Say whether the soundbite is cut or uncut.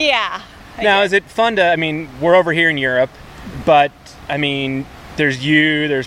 uncut